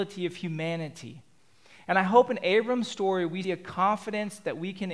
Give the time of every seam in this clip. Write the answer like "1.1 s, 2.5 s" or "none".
3.4 s